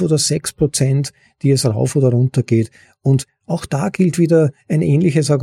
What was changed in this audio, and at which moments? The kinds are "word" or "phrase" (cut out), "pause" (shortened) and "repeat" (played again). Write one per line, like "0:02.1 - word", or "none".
none